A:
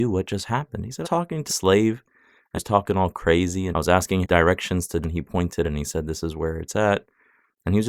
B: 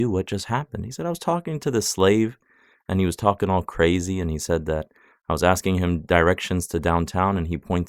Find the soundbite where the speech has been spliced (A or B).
A